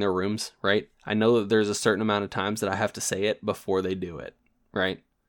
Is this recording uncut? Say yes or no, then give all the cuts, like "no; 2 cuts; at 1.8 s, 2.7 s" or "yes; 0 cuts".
yes; 0 cuts